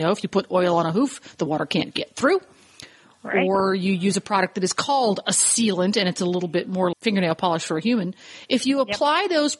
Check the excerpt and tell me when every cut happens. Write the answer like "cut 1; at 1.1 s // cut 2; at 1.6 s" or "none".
cut 1; at 6.9 s